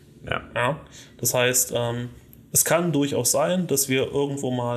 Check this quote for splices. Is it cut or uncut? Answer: uncut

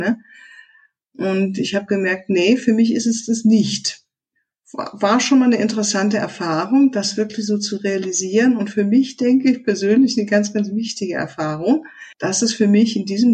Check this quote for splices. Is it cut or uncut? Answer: cut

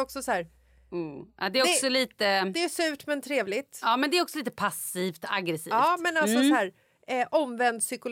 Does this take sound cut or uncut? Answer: uncut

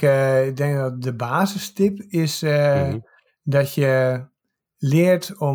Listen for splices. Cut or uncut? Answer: uncut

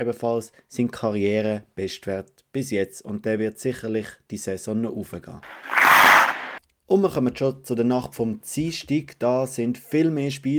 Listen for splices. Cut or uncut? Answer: uncut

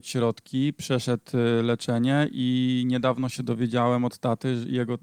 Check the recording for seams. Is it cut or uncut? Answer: uncut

